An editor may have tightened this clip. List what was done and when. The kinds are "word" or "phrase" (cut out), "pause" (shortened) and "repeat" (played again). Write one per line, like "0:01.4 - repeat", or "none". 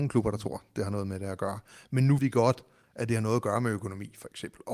0:02.2 - word